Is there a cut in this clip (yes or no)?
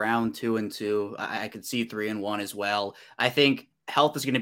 no